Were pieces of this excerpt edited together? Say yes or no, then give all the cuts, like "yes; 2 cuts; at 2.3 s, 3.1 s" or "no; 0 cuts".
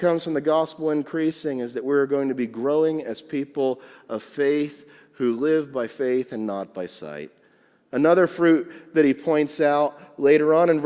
no; 0 cuts